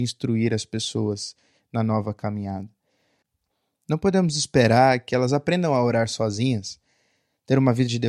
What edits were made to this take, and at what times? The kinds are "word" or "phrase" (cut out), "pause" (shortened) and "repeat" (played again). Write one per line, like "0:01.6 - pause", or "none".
none